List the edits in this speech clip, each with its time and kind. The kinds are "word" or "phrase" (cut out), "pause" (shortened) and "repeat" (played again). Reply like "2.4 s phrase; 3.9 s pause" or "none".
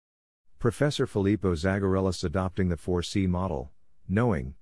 2.2 s word